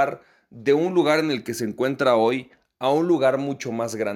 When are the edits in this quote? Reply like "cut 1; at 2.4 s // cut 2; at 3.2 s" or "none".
none